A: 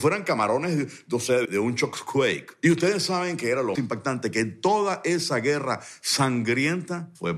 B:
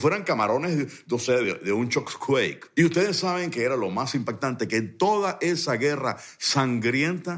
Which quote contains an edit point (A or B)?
A